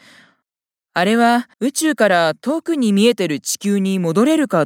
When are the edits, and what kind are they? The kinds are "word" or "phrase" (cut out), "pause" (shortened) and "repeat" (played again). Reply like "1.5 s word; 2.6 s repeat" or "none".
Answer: 1.5 s pause